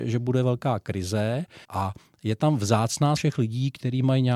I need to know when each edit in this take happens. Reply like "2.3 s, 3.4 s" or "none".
1.6 s, 3.2 s